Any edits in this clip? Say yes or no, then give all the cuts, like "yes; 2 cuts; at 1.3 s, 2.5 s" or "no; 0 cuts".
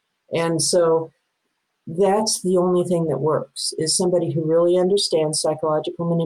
no; 0 cuts